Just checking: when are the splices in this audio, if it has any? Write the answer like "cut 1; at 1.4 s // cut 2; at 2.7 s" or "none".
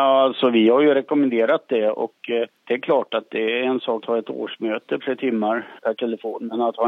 cut 1; at 2.6 s // cut 2; at 4.0 s // cut 3; at 5.0 s